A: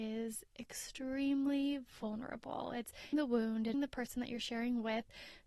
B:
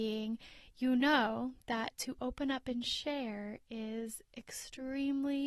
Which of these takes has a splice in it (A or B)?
A